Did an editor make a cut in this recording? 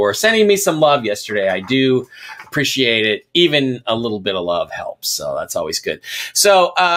no; 0 cuts

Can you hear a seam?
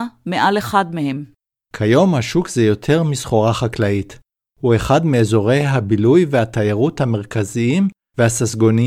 no; 0 cuts

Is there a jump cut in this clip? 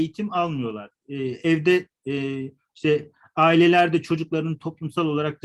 no; 0 cuts

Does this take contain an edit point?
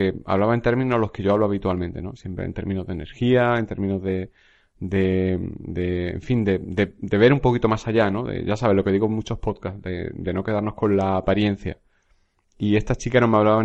no; 0 cuts

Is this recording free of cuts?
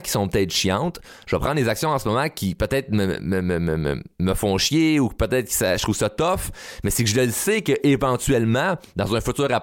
no; 1 cut; at 4.1 s

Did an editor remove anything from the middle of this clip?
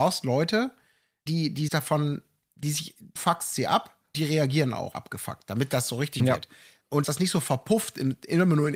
yes; 7 cuts; at 1.3 s, 1.7 s, 3.2 s, 4.1 s, 4.9 s, 6.2 s, 7.0 s

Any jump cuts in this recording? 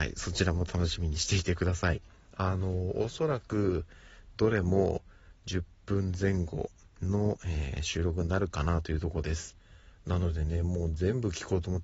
no; 0 cuts

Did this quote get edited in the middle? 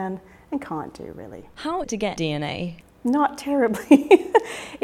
yes; 2 cuts; at 1.8 s, 2.2 s

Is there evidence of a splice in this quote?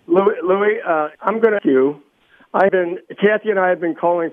yes; 3 cuts; at 1.1 s, 1.6 s, 2.7 s

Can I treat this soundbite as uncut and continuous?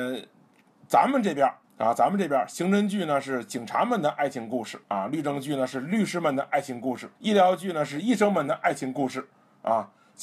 no; 3 cuts; at 1.6 s, 4.8 s, 7.2 s

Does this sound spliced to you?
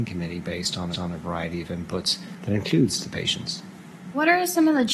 yes; 1 cut; at 0.9 s

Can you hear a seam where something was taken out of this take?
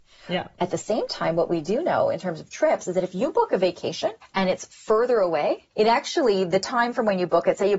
yes; 2 cuts; at 4.2 s, 5.7 s

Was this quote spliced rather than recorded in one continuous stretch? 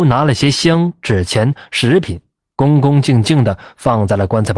no; 0 cuts

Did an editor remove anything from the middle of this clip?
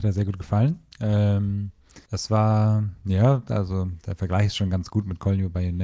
yes; 1 cut; at 2.0 s

